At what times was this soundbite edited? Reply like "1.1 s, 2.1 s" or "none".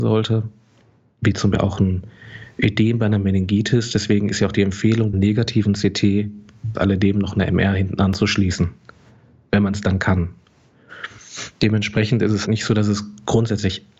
1.5 s, 5.1 s, 6.7 s, 12.4 s